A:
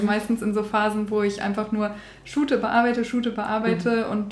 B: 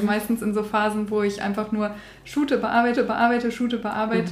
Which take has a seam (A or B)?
B